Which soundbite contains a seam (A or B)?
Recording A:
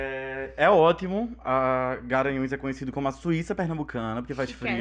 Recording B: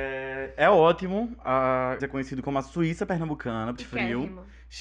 B